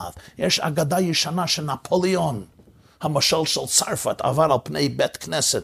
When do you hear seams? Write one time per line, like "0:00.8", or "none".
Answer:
none